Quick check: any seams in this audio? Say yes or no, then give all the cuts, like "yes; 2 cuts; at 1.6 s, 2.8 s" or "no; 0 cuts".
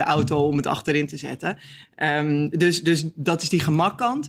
no; 0 cuts